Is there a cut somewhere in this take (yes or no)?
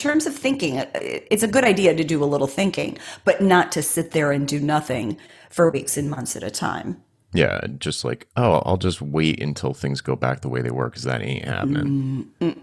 no